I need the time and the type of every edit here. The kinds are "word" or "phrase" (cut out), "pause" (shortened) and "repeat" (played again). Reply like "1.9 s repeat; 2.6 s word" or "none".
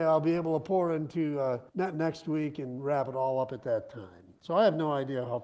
1.7 s pause